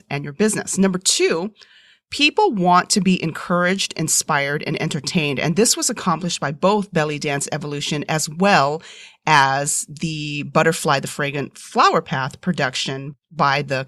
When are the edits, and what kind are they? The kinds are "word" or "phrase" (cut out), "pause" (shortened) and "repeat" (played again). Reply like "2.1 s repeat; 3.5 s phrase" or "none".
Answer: none